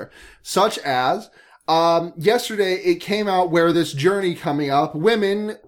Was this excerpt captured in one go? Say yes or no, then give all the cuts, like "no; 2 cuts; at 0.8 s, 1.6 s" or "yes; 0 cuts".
yes; 0 cuts